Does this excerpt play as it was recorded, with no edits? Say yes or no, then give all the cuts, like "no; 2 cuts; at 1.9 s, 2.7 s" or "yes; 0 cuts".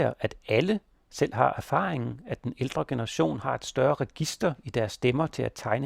yes; 0 cuts